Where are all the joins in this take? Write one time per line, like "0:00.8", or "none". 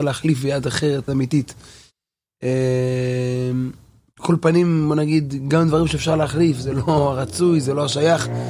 0:01.1